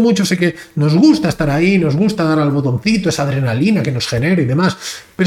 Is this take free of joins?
yes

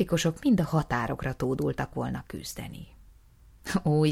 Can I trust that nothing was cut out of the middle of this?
yes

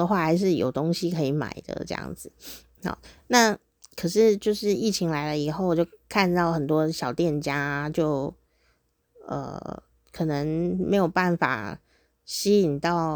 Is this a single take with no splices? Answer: yes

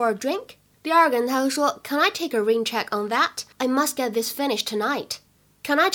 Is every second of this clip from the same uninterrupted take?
no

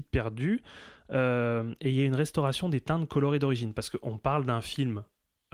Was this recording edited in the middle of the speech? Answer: no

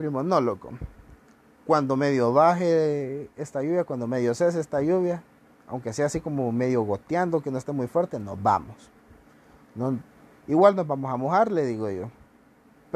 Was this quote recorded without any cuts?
yes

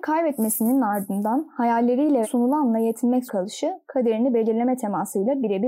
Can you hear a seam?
yes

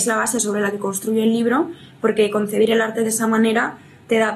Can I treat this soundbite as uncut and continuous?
yes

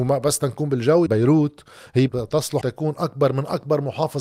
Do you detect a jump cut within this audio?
yes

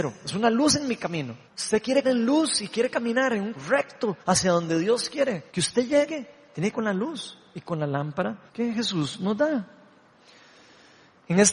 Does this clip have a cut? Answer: yes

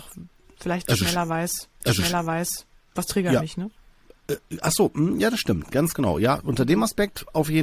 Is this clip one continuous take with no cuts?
no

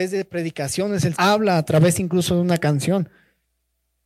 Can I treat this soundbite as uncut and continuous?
no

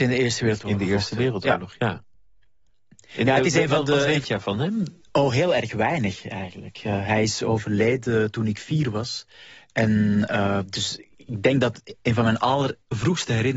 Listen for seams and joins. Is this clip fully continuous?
no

